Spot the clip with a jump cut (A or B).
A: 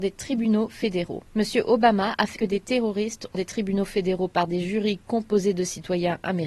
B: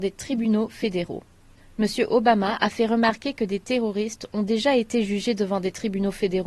A